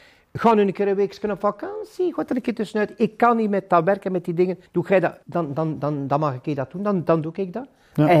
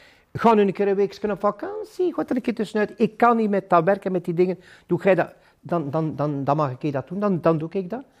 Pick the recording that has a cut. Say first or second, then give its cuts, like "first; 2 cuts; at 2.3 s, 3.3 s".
first; 2 cuts; at 4.7 s, 5.2 s